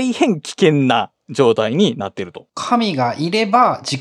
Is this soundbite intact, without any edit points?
no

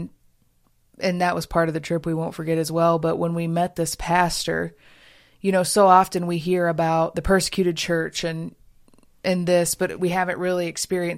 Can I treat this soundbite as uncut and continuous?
no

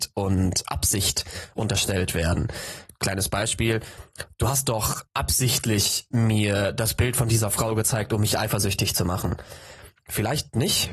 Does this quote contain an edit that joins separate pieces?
yes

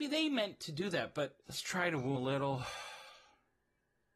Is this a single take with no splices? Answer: no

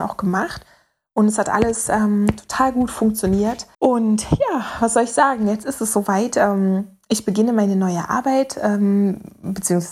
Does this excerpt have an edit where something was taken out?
yes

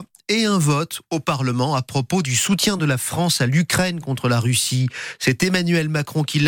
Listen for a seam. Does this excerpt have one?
no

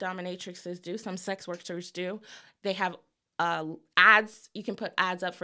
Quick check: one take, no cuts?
yes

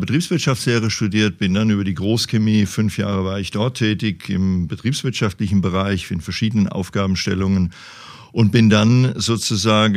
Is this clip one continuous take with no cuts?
yes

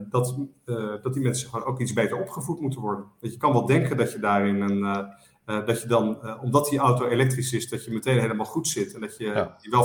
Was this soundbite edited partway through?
no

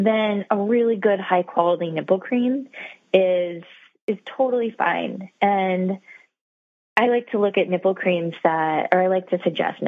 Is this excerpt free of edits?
yes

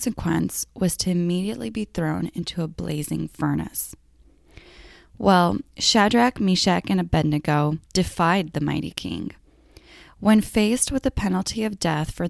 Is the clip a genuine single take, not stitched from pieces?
no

